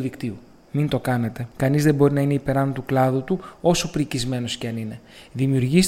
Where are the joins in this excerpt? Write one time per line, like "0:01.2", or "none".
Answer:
0:01.5